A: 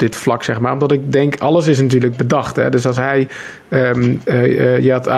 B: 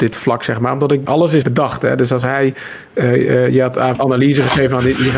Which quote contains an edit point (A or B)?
B